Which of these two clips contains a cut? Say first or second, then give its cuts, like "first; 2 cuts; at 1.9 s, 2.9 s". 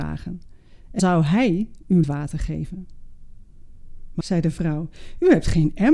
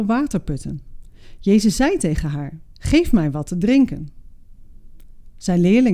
first; 3 cuts; at 1.0 s, 2.0 s, 4.2 s